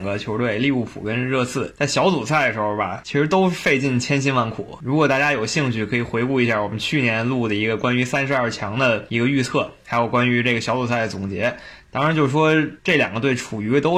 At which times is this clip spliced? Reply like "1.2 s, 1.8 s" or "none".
12.8 s